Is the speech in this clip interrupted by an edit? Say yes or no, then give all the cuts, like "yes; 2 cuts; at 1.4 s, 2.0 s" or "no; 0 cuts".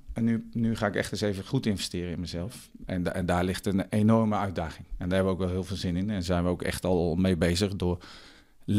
no; 0 cuts